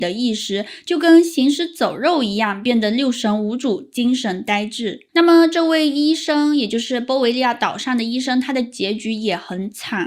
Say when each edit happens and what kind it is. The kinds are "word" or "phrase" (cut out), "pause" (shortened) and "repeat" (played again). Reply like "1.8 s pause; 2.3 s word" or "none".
5.1 s pause